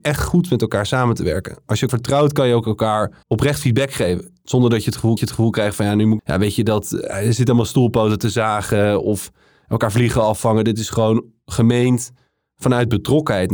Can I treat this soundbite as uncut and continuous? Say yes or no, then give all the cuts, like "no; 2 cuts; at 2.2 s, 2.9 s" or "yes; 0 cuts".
no; 4 cuts; at 1.9 s, 3.2 s, 5.2 s, 6.2 s